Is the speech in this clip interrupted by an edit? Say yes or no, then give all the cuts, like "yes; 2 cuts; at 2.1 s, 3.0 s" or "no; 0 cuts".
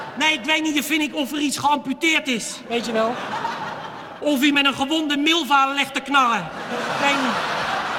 no; 0 cuts